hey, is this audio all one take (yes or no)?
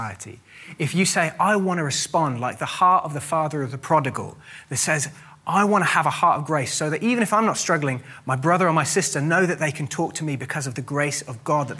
yes